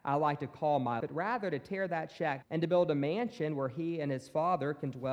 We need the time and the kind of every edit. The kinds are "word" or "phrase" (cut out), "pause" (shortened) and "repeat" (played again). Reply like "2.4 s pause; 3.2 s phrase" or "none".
1.0 s word; 2.4 s word